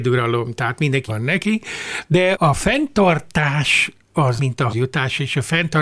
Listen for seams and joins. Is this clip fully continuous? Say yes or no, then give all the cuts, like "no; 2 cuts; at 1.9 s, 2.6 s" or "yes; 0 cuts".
no; 4 cuts; at 1.1 s, 2.3 s, 4.4 s, 4.7 s